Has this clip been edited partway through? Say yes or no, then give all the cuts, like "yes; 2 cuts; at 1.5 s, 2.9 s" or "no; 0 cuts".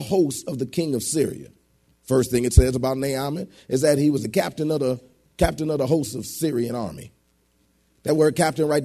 no; 0 cuts